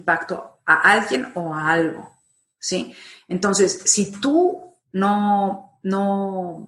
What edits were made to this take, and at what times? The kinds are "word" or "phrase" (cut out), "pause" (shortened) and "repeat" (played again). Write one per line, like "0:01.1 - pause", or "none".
none